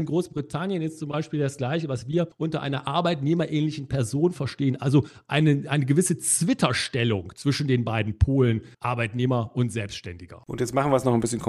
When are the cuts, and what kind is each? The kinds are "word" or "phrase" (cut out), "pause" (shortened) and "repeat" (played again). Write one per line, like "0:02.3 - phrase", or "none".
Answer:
0:08.7 - pause